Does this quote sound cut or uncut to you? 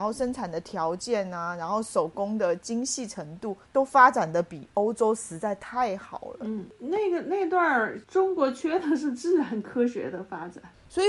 cut